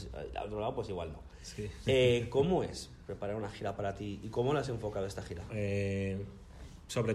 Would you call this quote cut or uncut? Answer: cut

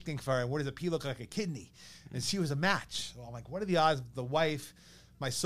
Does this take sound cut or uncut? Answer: uncut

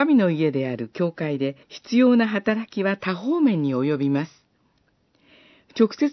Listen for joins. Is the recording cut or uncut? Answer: cut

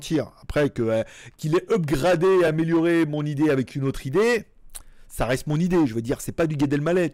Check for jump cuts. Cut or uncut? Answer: uncut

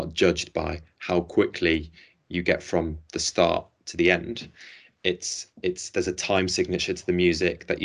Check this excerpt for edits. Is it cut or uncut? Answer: uncut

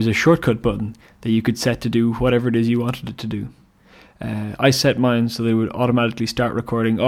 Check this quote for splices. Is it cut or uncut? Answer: uncut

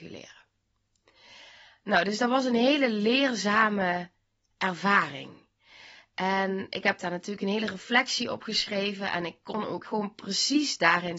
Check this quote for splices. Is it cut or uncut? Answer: cut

